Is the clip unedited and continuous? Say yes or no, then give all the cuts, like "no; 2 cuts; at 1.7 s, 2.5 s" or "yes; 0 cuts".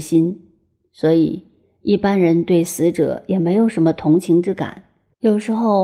yes; 0 cuts